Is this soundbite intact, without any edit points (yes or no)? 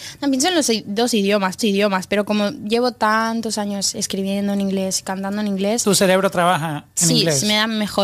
no